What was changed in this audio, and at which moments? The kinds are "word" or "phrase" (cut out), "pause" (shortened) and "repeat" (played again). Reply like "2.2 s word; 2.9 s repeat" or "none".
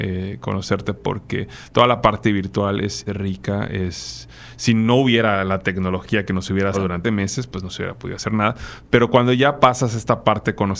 1.0 s word; 3.1 s word; 6.7 s word; 7.0 s word

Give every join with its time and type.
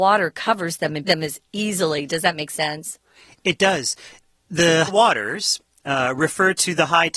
1.1 s phrase; 4.9 s word

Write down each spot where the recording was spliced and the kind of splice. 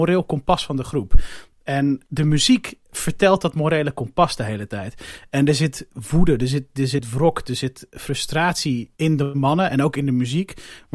2.0 s pause; 2.8 s pause; 8.9 s pause

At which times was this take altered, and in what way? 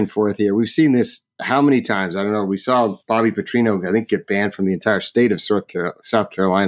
3.0 s pause

